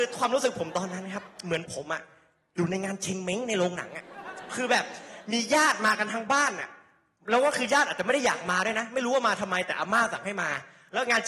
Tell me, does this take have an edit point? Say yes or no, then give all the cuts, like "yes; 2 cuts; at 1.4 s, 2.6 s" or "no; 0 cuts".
no; 0 cuts